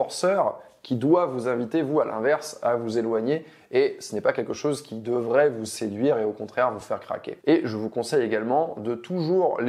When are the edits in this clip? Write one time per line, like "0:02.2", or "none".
none